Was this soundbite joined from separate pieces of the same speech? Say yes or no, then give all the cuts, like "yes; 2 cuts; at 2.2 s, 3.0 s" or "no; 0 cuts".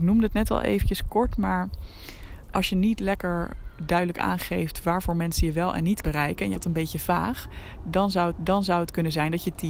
yes; 4 cuts; at 2.5 s, 6.0 s, 6.5 s, 8.3 s